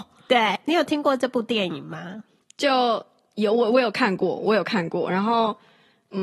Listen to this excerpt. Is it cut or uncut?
uncut